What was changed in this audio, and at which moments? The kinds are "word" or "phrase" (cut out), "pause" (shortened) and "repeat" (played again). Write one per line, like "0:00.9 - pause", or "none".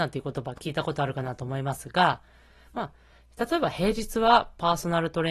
none